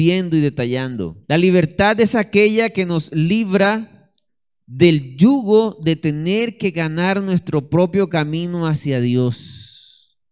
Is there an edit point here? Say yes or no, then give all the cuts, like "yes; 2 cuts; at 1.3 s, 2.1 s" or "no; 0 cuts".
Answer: yes; 2 cuts; at 1.2 s, 4.3 s